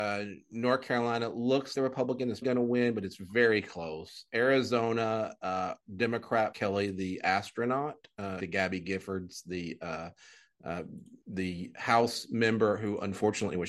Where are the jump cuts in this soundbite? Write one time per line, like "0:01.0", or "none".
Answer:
0:01.7
0:02.4
0:06.5
0:08.4
0:11.2